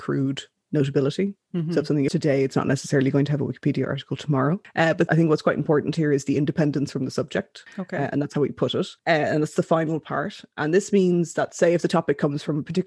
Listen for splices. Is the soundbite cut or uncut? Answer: cut